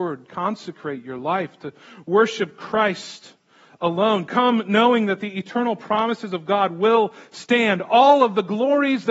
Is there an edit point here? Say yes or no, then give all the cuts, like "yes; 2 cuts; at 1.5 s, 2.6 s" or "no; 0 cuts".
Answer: no; 0 cuts